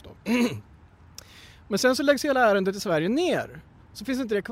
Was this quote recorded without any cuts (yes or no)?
yes